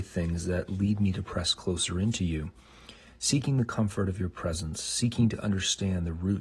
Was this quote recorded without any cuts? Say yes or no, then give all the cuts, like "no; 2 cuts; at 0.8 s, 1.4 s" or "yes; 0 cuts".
yes; 0 cuts